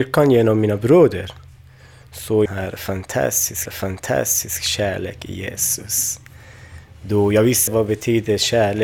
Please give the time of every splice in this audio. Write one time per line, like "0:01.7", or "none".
0:02.5
0:03.7
0:07.7